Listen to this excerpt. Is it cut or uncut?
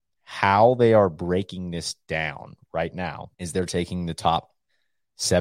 cut